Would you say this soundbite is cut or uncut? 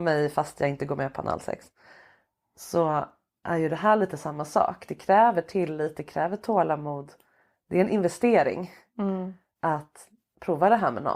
uncut